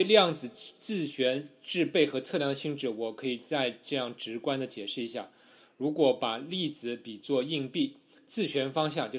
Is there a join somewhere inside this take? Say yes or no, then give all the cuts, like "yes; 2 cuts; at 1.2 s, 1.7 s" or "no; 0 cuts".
no; 0 cuts